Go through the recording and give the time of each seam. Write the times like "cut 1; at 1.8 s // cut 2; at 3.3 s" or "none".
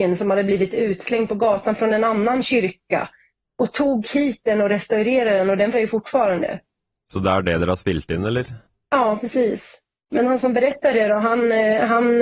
cut 1; at 5.7 s